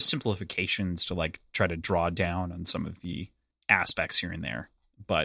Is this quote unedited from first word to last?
yes; 0 cuts

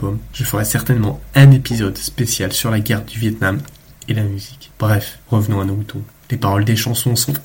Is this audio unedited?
yes; 0 cuts

